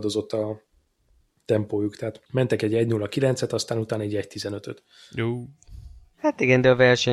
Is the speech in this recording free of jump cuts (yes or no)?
no